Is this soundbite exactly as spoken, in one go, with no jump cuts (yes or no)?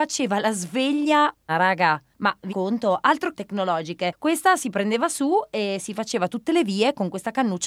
no